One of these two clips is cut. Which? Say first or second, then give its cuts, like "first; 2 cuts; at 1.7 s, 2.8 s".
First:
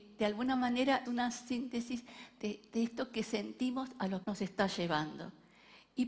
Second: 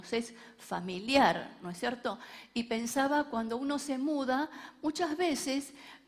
first; 2 cuts; at 1.1 s, 4.2 s